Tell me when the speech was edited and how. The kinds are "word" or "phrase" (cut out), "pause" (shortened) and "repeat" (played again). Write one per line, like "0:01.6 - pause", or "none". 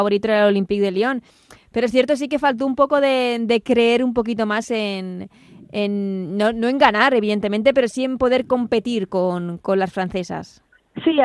none